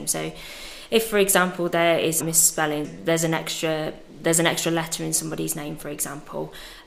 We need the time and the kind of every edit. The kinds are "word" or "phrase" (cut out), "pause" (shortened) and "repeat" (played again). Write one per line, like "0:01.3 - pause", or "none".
0:02.2 - phrase
0:02.8 - word